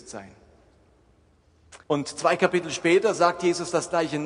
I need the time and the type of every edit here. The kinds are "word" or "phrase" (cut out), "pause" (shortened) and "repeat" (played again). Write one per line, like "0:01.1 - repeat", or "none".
0:01.8 - pause